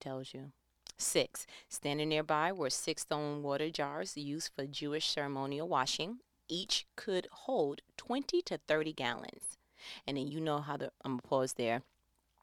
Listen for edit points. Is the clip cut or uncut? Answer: uncut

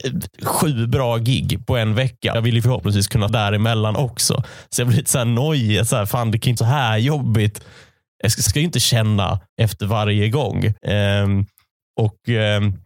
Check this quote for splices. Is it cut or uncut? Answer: cut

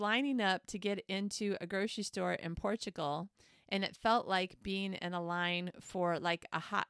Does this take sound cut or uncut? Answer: uncut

